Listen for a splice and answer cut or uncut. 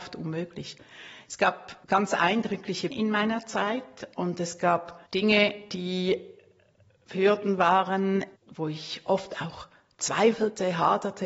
cut